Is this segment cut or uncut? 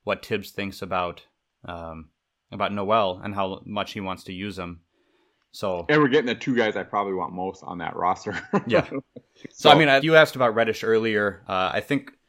cut